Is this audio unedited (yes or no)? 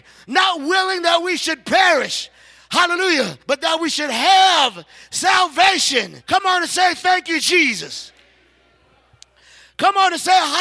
no